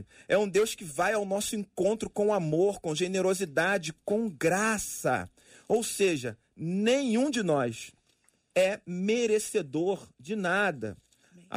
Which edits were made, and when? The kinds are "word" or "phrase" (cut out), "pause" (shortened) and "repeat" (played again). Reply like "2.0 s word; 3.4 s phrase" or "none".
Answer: none